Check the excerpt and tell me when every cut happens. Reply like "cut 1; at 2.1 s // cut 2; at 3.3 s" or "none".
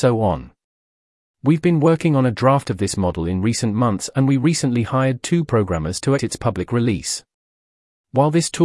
cut 1; at 6.2 s